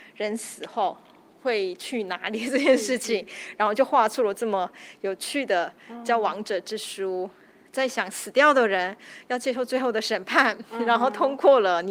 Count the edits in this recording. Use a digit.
0